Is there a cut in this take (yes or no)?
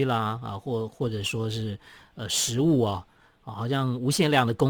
no